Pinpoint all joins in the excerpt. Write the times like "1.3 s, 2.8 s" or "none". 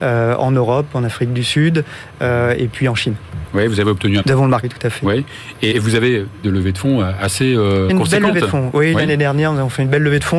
4.2 s, 4.6 s, 5.7 s, 6.4 s, 7.9 s